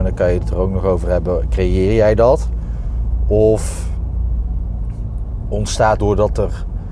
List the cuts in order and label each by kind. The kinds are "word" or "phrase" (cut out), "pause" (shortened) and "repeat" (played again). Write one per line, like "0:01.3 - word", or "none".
0:06.0 - word